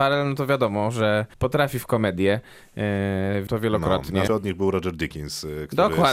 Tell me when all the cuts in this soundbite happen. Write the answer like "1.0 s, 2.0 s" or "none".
1.3 s, 3.5 s, 4.3 s